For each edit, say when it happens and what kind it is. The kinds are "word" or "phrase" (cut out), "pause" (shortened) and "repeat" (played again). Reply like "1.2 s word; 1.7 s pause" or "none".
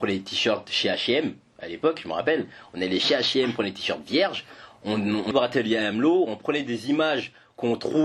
5.3 s word